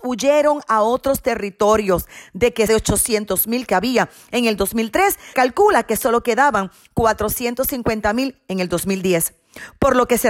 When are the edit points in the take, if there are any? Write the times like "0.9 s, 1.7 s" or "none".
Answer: 2.7 s, 3.7 s, 5.3 s